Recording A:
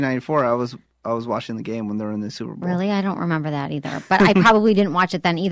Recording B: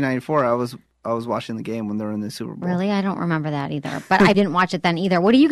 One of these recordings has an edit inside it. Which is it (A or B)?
B